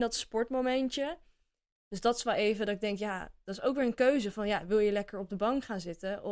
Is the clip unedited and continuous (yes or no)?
yes